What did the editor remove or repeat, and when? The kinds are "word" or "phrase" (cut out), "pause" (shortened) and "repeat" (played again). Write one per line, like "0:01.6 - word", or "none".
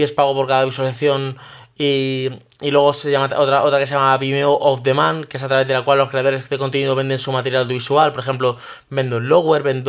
none